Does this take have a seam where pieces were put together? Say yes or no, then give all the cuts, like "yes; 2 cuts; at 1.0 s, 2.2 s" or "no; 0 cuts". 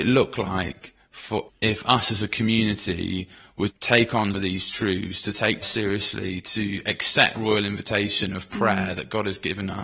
yes; 5 cuts; at 1.5 s, 3.7 s, 4.3 s, 5.6 s, 7.3 s